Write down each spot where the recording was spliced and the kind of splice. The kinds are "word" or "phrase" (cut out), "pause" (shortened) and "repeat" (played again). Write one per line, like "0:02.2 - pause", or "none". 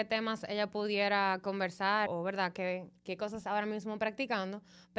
0:02.1 - word
0:03.0 - pause
0:03.4 - word